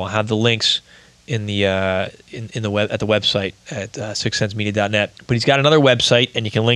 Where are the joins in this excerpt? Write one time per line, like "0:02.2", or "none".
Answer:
0:05.2